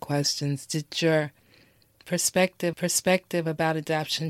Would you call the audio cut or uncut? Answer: cut